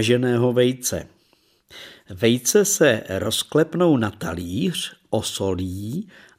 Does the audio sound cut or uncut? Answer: uncut